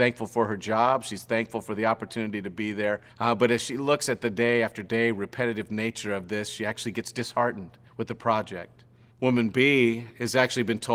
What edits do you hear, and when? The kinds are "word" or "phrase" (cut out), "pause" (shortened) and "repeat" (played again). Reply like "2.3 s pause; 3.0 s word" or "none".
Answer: 3.1 s pause; 7.9 s pause; 9.1 s pause